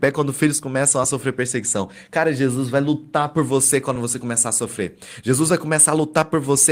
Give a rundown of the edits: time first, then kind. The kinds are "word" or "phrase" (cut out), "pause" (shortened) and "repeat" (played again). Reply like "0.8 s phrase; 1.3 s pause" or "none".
none